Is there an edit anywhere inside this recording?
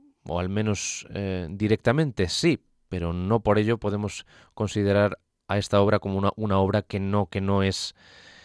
no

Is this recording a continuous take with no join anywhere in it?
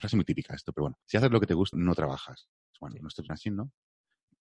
no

